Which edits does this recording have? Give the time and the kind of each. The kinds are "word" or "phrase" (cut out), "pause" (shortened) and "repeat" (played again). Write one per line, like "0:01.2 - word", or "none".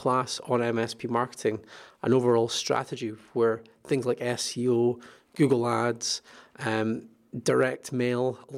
none